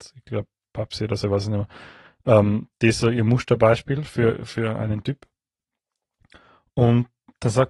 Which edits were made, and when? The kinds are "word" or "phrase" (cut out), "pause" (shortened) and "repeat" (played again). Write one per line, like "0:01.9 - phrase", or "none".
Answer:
none